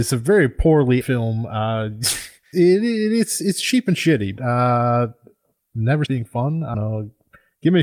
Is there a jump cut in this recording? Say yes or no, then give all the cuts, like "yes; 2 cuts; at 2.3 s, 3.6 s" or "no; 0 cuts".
yes; 5 cuts; at 1.0 s, 2.5 s, 4.4 s, 6.1 s, 6.7 s